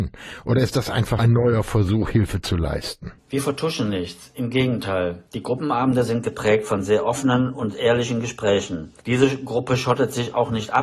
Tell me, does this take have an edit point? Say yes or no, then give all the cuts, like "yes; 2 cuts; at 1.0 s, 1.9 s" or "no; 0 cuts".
yes; 4 cuts; at 1.2 s, 3.2 s, 5.3 s, 9.0 s